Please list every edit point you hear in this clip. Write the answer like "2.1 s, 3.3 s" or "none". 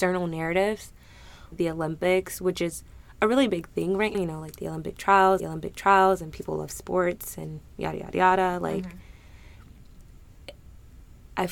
1.5 s, 4.1 s, 5.4 s